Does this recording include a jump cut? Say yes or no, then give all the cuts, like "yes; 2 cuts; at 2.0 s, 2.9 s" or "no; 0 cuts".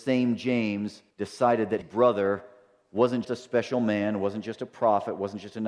yes; 3 cuts; at 1.1 s, 1.8 s, 3.2 s